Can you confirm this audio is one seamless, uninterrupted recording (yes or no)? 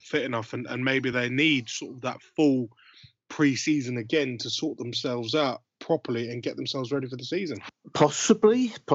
yes